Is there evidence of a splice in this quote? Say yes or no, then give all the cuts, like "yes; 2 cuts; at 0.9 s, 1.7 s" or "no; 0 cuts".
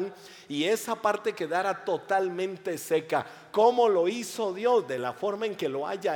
no; 0 cuts